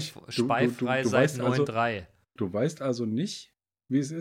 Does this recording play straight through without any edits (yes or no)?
yes